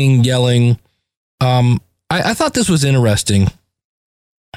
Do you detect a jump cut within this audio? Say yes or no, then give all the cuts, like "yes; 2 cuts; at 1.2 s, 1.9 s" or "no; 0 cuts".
no; 0 cuts